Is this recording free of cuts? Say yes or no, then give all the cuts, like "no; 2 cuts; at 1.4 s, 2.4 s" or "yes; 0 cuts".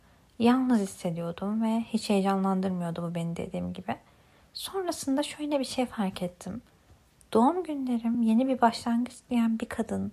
yes; 0 cuts